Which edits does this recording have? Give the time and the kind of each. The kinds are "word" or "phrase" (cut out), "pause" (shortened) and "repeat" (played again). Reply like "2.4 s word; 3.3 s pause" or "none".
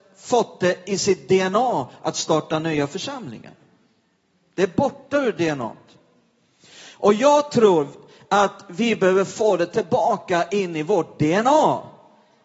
none